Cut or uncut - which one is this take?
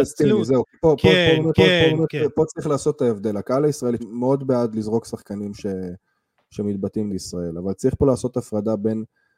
cut